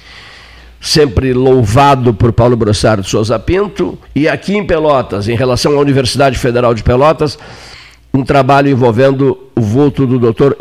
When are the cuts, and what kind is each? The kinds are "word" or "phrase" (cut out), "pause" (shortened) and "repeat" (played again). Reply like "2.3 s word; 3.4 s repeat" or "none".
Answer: 4.0 s pause